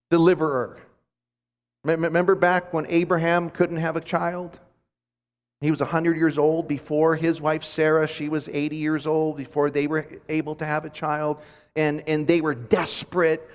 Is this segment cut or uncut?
uncut